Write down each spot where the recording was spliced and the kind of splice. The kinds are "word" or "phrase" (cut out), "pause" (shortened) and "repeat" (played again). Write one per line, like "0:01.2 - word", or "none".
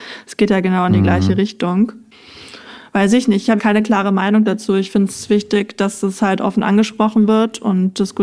0:03.6 - word